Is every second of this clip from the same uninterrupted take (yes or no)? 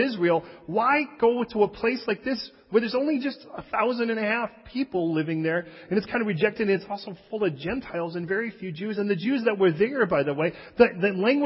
yes